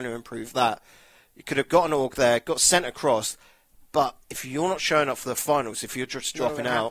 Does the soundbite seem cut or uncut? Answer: uncut